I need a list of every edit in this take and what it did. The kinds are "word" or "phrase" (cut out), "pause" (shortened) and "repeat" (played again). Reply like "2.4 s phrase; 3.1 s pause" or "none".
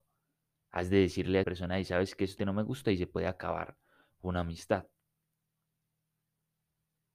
1.4 s word; 2.4 s word